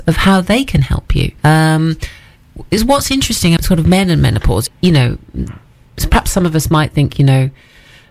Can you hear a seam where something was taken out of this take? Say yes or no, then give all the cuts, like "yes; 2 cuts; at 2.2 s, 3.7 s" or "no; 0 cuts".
yes; 3 cuts; at 1.4 s, 3.6 s, 4.7 s